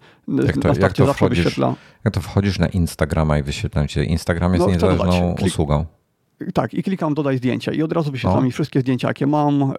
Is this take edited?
no; 0 cuts

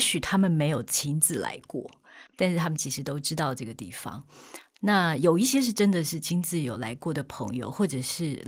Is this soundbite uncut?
no; 1 cut; at 2.3 s

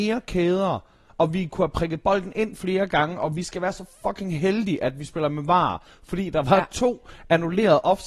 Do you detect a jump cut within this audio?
no; 0 cuts

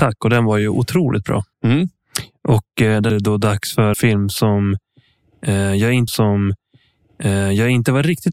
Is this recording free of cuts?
no; 4 cuts; at 1.5 s, 3.1 s, 3.9 s, 6.1 s

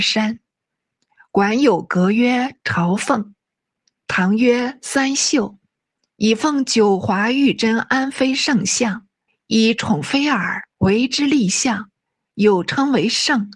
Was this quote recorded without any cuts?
no; 2 cuts; at 9.3 s, 10.7 s

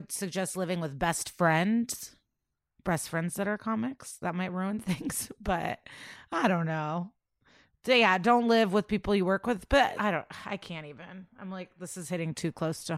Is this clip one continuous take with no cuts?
no; 1 cut; at 10.0 s

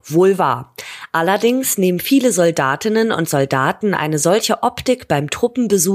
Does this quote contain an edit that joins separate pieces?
no; 0 cuts

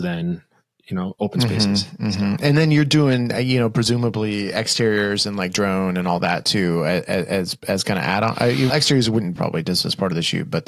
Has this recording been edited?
yes; 2 cuts; at 8.7 s, 9.4 s

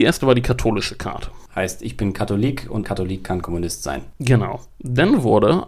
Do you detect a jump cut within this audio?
yes; 2 cuts; at 2.8 s, 3.4 s

